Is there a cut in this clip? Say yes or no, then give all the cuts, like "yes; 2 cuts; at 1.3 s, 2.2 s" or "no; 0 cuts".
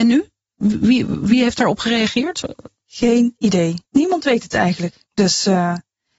yes; 2 cuts; at 3.8 s, 5.0 s